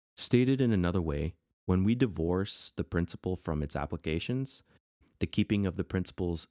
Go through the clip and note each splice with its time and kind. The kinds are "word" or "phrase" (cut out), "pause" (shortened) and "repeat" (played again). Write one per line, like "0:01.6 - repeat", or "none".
none